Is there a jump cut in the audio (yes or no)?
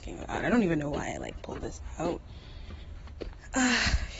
no